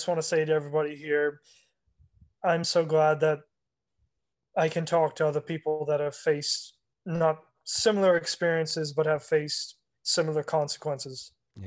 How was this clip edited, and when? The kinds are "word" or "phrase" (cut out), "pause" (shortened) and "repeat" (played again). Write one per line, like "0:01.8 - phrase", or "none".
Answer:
none